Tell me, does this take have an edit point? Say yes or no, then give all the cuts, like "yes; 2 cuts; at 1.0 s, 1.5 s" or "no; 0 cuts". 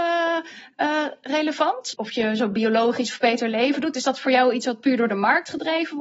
no; 0 cuts